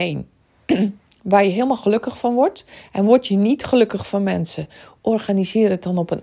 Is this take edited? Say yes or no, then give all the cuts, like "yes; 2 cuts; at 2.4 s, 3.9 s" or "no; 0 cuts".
no; 0 cuts